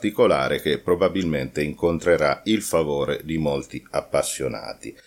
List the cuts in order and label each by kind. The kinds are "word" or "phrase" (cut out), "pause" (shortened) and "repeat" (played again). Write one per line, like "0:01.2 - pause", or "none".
none